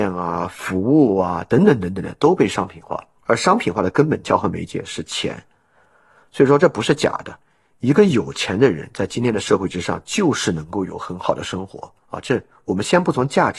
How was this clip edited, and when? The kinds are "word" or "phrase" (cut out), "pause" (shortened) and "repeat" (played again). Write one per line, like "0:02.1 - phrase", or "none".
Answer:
0:03.2 - pause
0:12.0 - pause

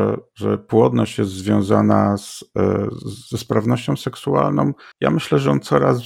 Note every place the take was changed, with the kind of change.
0:03.3 - pause
0:04.9 - pause

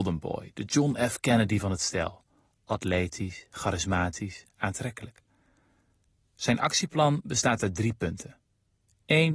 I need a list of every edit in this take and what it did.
none

